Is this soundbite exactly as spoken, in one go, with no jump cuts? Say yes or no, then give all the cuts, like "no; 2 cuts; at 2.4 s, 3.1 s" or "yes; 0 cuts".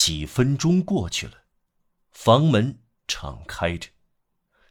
yes; 0 cuts